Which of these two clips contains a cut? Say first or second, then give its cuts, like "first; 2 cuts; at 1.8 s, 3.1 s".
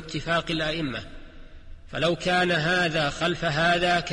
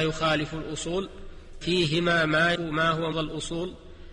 second; 3 cuts; at 1.6 s, 2.5 s, 3.1 s